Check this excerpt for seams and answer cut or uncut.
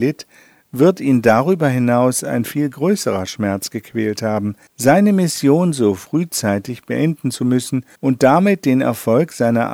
cut